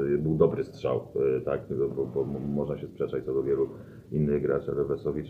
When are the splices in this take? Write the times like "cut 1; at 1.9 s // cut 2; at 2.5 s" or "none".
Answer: none